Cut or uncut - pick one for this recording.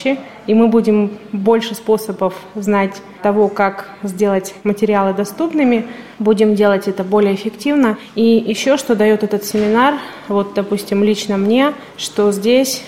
uncut